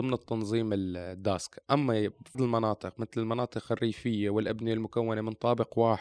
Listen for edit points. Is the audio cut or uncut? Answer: cut